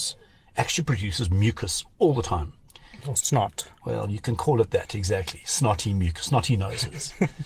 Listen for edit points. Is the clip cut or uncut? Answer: cut